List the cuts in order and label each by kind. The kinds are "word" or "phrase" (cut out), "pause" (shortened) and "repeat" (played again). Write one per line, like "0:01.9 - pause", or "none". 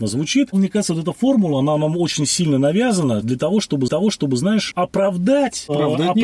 0:03.9 - repeat

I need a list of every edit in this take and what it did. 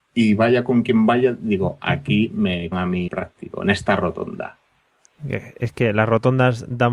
0:02.7 - word
0:03.1 - word

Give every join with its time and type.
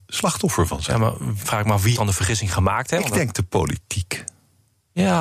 0:01.4 - word
0:01.9 - word

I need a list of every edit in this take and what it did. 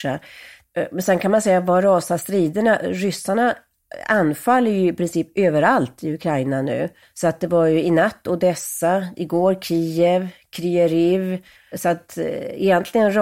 0:07.0 - pause
0:11.6 - pause

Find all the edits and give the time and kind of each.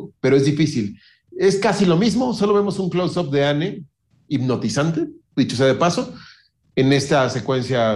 none

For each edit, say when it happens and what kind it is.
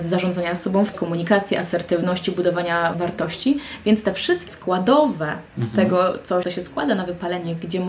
0:00.9 - word
0:02.9 - word
0:04.5 - word
0:05.5 - pause
0:06.4 - phrase

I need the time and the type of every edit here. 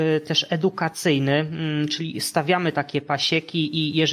none

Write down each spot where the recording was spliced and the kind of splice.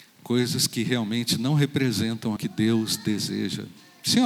0:02.4 - word

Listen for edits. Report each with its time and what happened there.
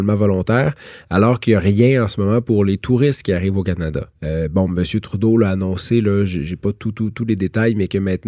0:04.1 - pause

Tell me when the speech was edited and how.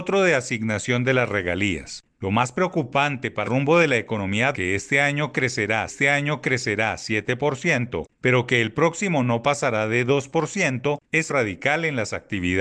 0:03.4 - word
0:04.5 - word
0:05.9 - repeat
0:11.3 - phrase

